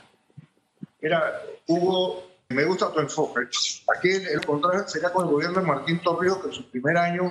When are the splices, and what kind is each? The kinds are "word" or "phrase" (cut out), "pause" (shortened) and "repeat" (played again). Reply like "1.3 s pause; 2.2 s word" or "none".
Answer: 0.9 s pause; 2.5 s word; 4.4 s phrase